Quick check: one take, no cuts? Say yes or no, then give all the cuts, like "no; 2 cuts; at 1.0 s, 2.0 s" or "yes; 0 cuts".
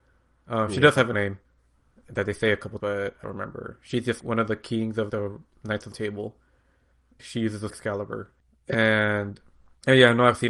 no; 8 cuts; at 1.1 s, 2.8 s, 3.2 s, 4.2 s, 5.1 s, 5.9 s, 7.2 s, 7.7 s